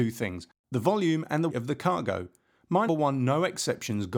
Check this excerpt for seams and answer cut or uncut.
cut